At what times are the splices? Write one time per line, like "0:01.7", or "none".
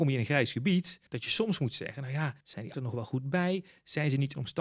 0:01.1
0:02.4
0:02.7